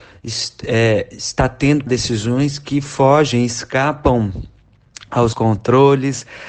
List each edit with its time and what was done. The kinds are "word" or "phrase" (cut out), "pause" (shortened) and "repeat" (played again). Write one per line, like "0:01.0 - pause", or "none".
0:01.9 - word
0:05.3 - word